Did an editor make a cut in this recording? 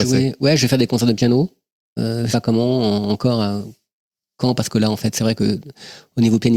yes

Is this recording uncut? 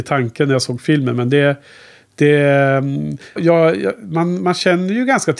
no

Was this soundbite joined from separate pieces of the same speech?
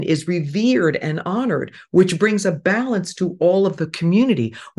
no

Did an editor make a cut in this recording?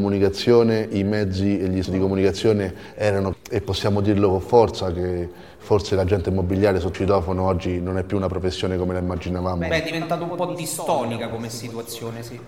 yes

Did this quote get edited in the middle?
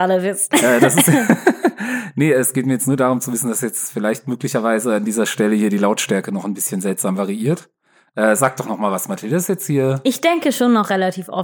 no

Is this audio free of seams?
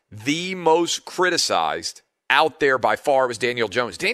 no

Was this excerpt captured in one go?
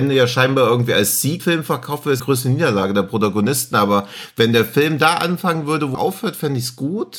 no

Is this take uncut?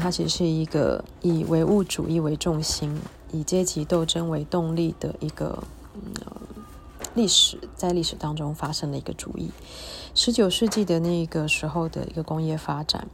yes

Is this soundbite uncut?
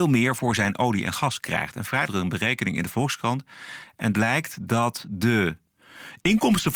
no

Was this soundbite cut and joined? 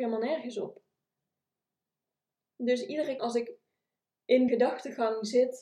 yes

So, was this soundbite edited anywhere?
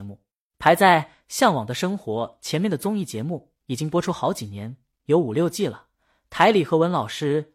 no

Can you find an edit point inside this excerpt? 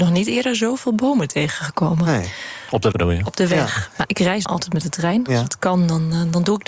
yes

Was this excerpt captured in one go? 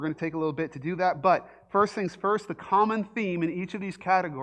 yes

